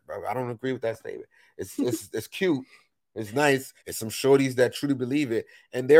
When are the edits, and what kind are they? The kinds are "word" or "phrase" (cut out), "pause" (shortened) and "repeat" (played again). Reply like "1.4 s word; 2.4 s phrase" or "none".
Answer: 1.8 s word; 3.8 s pause